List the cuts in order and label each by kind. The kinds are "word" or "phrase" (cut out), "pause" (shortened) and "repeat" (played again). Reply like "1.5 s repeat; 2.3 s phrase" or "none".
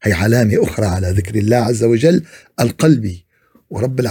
none